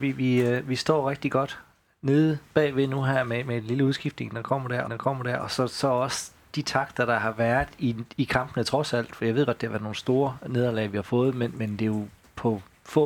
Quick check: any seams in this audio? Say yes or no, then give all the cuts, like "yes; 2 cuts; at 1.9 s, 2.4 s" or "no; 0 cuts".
yes; 1 cut; at 4.8 s